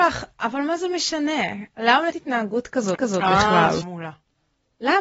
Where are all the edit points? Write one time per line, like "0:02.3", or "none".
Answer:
0:02.1
0:03.0
0:03.8